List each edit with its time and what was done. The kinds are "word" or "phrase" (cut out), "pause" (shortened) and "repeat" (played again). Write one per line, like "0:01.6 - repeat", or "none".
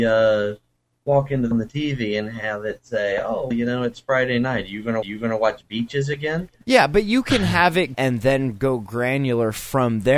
0:01.5 - phrase
0:03.5 - word
0:05.0 - repeat
0:07.9 - phrase